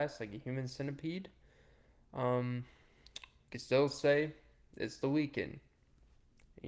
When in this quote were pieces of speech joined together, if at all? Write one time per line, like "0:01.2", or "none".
0:03.5